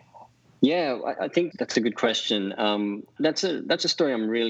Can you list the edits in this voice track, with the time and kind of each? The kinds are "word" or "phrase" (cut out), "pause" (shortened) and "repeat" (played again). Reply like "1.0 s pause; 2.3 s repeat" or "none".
1.5 s word; 3.2 s word

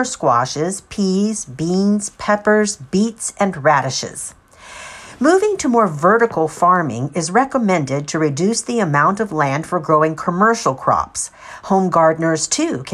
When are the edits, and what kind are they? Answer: none

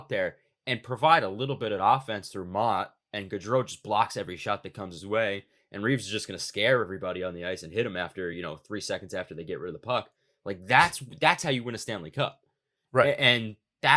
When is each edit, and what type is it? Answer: none

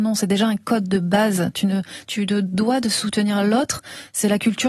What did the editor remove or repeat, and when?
none

